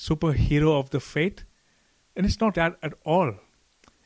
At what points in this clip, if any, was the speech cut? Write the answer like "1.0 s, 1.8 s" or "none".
2.5 s